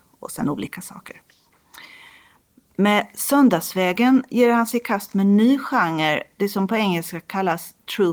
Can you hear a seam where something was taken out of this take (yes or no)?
no